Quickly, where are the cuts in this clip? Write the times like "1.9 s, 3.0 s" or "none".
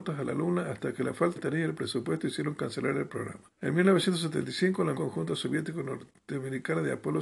1.4 s, 3.5 s, 4.9 s